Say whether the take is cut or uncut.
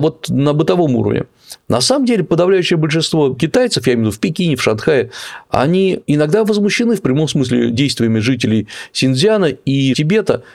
uncut